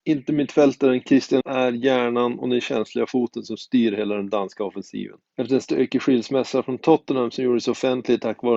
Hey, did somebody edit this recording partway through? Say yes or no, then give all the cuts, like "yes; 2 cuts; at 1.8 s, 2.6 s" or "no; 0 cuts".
yes; 2 cuts; at 1.4 s, 5.3 s